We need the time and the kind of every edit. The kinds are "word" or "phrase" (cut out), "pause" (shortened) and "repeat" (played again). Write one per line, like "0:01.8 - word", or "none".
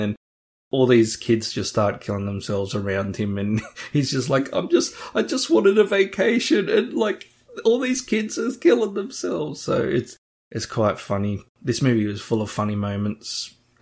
0:11.5 - pause